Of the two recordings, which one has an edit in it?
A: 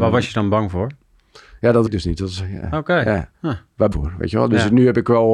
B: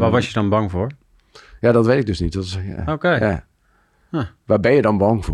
A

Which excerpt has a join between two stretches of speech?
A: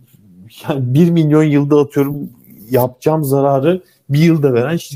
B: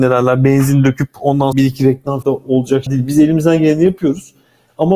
B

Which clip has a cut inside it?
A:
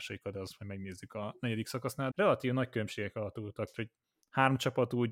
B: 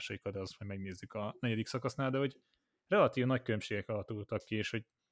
A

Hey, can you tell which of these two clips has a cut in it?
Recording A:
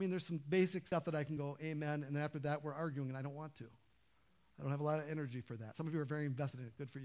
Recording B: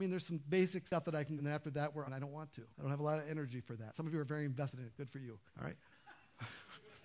B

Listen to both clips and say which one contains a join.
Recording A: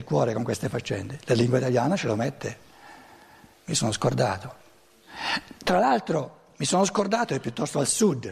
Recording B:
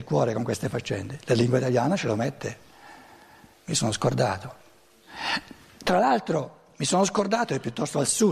A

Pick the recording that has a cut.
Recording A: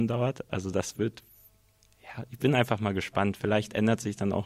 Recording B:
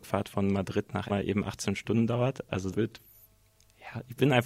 B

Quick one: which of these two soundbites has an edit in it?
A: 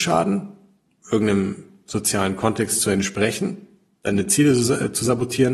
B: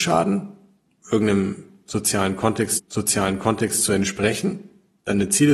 B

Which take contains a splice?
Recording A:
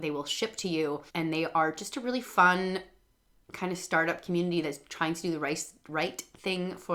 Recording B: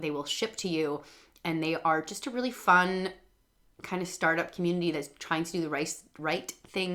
A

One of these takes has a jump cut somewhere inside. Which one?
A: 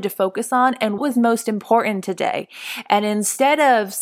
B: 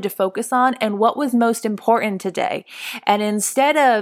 A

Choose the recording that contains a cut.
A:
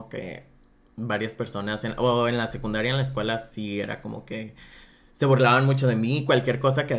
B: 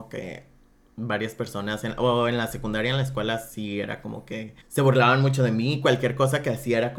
B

